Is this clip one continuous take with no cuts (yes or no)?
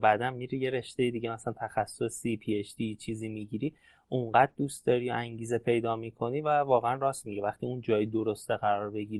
yes